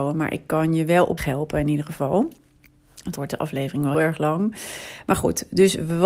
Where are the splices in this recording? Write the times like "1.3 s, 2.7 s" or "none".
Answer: 1.2 s, 3.2 s, 3.9 s